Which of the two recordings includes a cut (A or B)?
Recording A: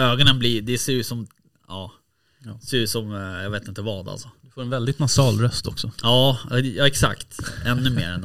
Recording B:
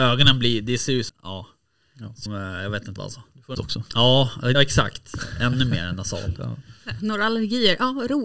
B